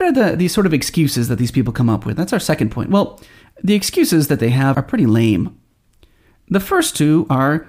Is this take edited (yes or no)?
yes